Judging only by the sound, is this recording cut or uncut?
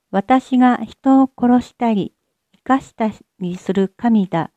uncut